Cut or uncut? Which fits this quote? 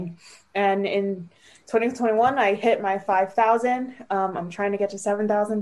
uncut